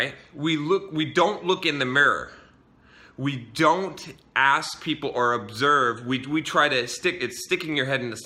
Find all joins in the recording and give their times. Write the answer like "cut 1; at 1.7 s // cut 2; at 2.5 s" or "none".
none